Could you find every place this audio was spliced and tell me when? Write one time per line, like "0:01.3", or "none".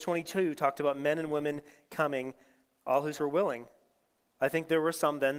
0:03.2